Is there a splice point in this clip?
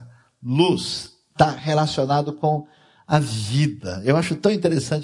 no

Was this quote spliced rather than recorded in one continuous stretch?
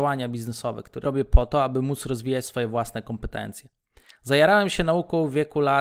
yes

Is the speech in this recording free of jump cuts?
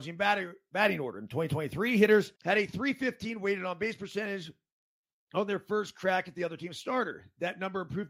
no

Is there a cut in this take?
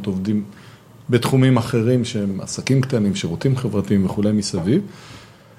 no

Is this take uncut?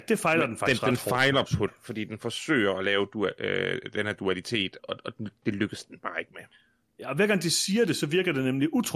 no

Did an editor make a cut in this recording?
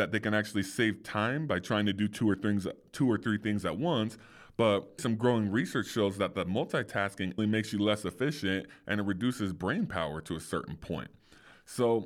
yes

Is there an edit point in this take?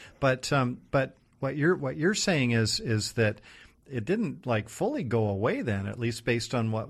no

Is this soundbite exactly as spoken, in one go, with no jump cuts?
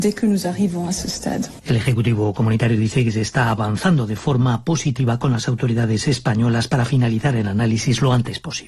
yes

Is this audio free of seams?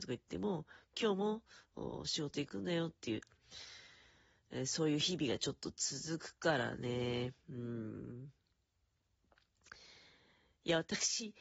yes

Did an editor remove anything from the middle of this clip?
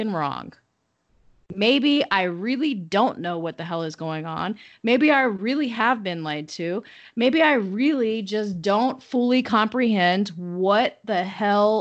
no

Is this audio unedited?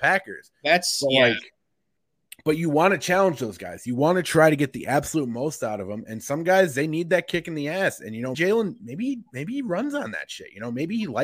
no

